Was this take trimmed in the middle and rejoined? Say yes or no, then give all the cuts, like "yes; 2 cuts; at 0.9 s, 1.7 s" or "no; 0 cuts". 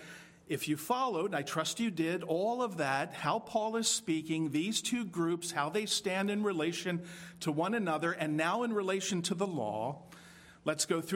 no; 0 cuts